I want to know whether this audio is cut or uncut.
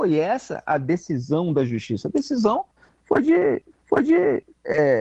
cut